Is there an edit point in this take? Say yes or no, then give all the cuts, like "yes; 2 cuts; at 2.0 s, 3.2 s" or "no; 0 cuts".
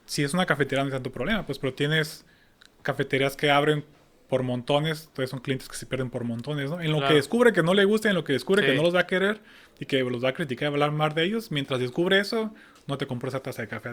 no; 0 cuts